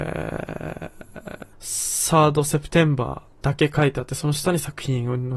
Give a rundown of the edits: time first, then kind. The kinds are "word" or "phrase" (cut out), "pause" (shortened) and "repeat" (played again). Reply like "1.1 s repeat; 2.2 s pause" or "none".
1.5 s pause

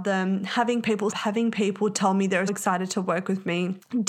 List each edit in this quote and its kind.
1.1 s phrase; 2.5 s word

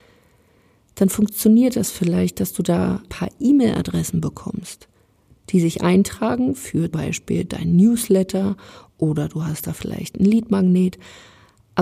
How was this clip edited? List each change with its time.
3.1 s word; 6.9 s word

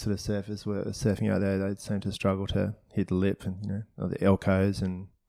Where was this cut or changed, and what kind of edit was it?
none

